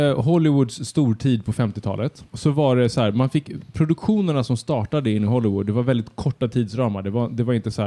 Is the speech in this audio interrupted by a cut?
yes; 1 cut; at 2.3 s

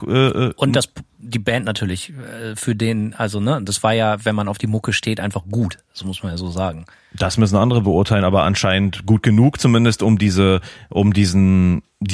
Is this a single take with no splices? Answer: yes; 0 cuts

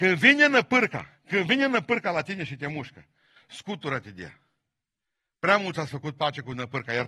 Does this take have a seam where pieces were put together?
no; 0 cuts

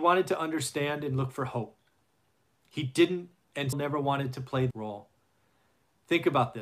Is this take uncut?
no; 2 cuts; at 3.7 s, 4.7 s

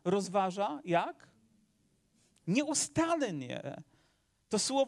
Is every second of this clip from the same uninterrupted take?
yes; 0 cuts

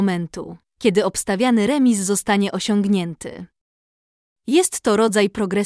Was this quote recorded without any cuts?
yes; 0 cuts

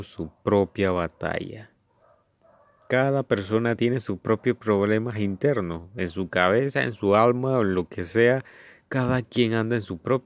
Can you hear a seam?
no; 0 cuts

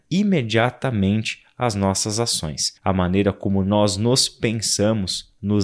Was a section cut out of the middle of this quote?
yes; 1 cut; at 2.8 s

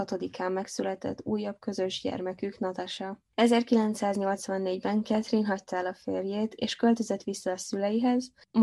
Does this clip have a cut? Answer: no; 0 cuts

